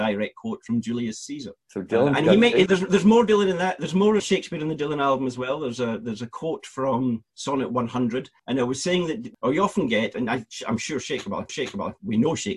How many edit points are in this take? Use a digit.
3